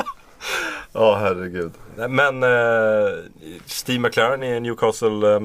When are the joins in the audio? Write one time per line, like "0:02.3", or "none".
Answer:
none